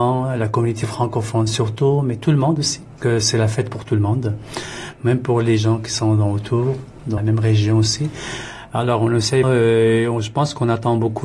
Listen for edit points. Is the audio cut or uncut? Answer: cut